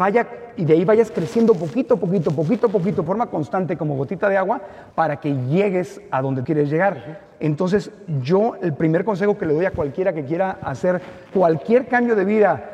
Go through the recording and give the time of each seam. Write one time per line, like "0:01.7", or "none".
0:03.1
0:04.9
0:06.4
0:11.3